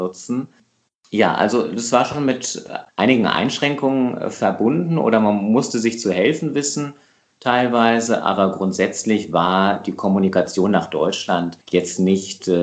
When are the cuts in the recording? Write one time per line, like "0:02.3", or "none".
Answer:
none